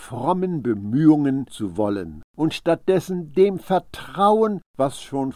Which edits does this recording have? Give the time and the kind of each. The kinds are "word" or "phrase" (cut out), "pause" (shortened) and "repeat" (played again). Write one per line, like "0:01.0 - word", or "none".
0:01.5 - word